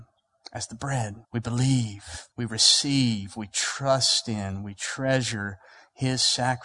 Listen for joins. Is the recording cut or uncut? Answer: cut